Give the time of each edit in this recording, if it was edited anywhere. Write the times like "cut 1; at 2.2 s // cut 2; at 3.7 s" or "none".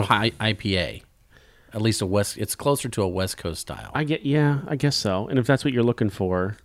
none